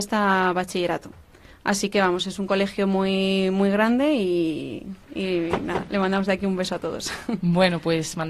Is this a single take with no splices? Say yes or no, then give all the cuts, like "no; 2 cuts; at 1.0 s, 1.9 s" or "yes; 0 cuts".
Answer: no; 1 cut; at 5.0 s